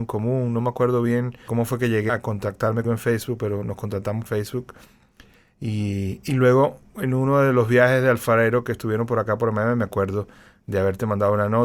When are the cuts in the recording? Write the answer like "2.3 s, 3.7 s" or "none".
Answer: 1.5 s, 2.1 s, 2.8 s, 4.3 s